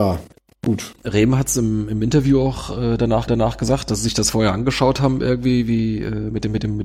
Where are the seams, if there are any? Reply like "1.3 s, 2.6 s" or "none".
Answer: 3.3 s, 4.3 s